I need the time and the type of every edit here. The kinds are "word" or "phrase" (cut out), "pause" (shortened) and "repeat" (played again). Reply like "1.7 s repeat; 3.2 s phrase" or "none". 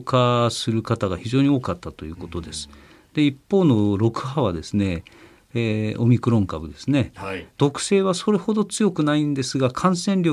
none